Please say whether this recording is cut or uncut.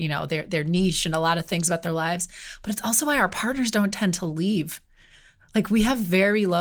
uncut